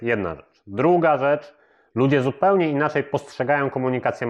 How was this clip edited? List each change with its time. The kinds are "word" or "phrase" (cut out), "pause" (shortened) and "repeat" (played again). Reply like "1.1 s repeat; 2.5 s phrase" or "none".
none